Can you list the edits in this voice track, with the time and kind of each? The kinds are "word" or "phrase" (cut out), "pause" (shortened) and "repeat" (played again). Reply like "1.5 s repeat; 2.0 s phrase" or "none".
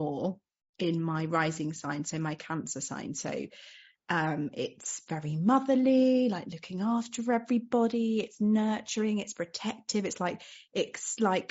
none